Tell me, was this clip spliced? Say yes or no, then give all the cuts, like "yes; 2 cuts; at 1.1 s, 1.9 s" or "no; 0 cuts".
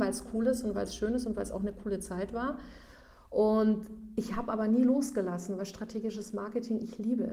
no; 0 cuts